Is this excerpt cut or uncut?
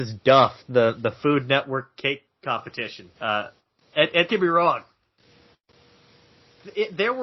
cut